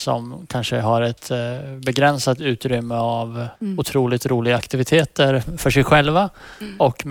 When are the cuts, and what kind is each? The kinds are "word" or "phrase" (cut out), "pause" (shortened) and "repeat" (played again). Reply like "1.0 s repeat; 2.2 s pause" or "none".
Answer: 3.6 s pause